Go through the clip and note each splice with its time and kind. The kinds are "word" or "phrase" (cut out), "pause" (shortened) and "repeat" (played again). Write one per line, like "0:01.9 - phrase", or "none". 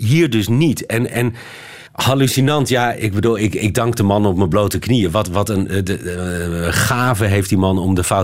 0:01.9 - pause